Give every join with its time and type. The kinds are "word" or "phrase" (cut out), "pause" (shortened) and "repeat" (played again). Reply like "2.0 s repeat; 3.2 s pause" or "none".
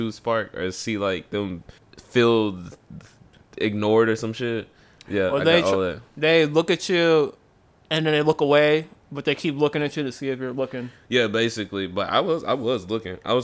1.8 s pause